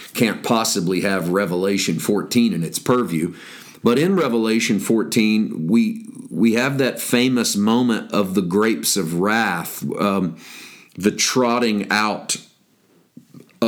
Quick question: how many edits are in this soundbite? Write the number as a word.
zero